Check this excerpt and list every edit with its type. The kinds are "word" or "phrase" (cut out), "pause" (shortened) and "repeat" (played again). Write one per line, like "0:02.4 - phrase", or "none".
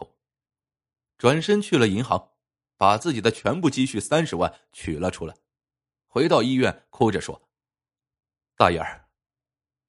none